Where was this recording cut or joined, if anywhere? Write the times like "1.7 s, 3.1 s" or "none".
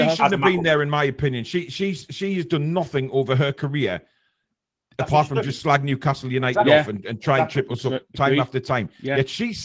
none

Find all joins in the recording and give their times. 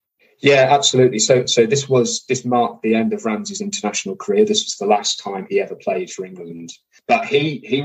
none

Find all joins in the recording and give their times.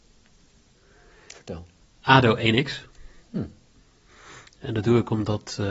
3.2 s

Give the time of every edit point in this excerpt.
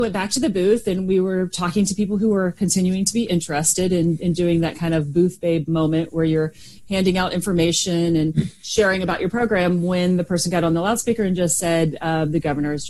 none

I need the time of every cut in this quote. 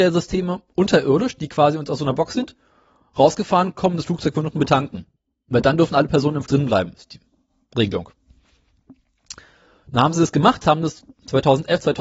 6.5 s

